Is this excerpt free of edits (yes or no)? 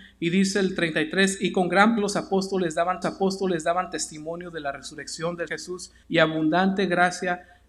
no